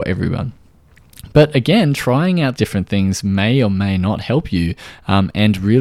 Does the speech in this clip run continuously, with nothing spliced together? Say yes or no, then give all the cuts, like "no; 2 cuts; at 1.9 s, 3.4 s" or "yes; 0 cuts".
no; 1 cut; at 2.6 s